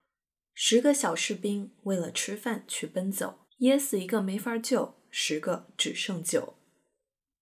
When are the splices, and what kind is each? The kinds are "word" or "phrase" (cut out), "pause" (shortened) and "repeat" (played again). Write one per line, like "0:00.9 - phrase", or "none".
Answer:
0:03.4 - pause